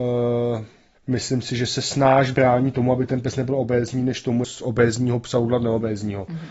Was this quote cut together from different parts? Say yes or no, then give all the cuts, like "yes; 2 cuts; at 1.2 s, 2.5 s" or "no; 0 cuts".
yes; 2 cuts; at 0.9 s, 4.4 s